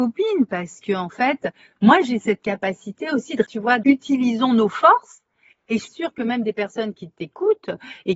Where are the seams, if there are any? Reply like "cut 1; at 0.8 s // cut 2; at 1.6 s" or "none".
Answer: cut 1; at 3.4 s // cut 2; at 3.8 s // cut 3; at 5.9 s